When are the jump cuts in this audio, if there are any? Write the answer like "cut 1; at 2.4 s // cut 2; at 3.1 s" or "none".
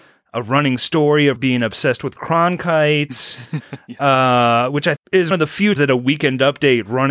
cut 1; at 1.4 s // cut 2; at 2.2 s // cut 3; at 5.0 s // cut 4; at 5.3 s // cut 5; at 5.8 s